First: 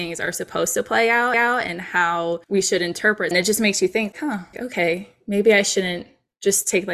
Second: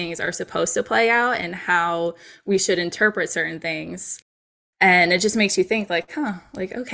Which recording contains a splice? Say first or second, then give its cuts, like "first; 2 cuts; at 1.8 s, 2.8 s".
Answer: first; 5 cuts; at 1.3 s, 2.4 s, 3.3 s, 4.1 s, 4.5 s